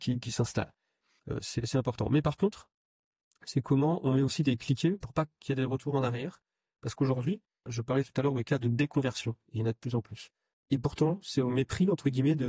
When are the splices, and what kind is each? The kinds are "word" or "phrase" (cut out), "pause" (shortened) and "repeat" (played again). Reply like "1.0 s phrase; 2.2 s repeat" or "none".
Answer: none